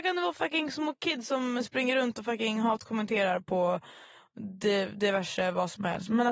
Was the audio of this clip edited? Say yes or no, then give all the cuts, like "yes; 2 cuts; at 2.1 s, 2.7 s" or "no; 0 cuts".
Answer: no; 0 cuts